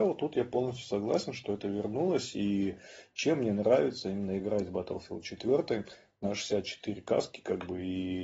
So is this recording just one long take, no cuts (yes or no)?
yes